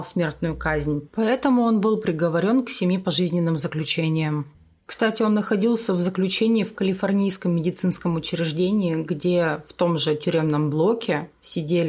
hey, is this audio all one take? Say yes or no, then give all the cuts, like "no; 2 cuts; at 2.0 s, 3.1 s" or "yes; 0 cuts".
yes; 0 cuts